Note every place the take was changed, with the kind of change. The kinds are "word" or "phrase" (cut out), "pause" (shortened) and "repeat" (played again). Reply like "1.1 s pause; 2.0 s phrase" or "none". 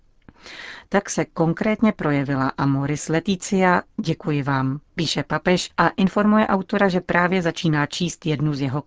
4.9 s pause